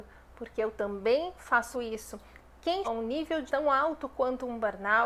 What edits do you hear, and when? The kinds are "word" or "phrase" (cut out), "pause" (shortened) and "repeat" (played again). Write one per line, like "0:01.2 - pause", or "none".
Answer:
0:01.7 - word
0:02.8 - word
0:03.5 - word